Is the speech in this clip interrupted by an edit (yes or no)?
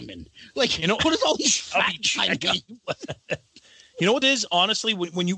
yes